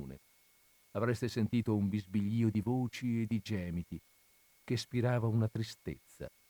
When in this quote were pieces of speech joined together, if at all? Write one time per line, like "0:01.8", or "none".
none